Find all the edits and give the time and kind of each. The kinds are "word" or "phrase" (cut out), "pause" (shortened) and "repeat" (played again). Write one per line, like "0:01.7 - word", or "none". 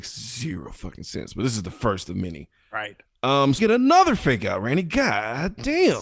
0:03.6 - word